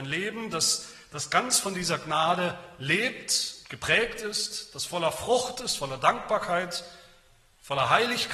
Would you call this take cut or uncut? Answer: uncut